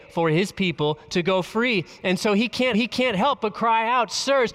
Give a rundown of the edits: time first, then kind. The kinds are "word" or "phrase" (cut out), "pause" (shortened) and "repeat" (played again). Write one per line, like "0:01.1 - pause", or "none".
0:02.7 - repeat